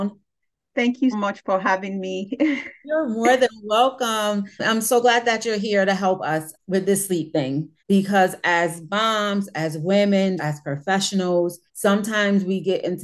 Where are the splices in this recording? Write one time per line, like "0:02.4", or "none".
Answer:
0:01.1
0:04.5
0:07.8
0:10.4
0:11.7